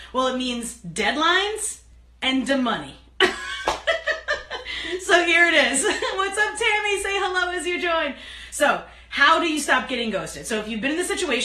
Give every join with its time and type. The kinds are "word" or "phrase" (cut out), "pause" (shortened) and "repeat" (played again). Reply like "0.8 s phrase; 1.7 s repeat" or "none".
none